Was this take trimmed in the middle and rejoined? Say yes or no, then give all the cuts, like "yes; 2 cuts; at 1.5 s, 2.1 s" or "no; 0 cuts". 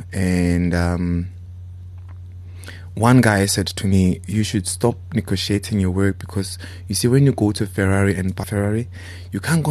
yes; 1 cut; at 8.4 s